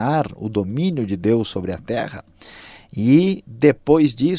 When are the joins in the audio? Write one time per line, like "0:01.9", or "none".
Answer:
none